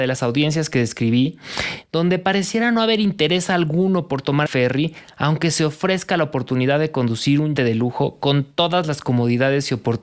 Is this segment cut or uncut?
cut